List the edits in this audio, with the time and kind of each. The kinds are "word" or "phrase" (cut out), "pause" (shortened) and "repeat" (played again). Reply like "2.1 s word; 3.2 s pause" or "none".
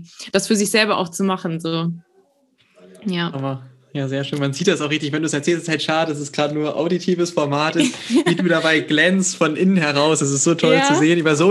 none